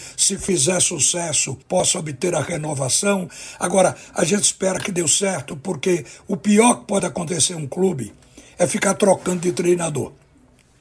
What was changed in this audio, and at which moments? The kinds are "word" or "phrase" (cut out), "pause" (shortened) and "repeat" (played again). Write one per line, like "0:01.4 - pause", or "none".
0:01.6 - pause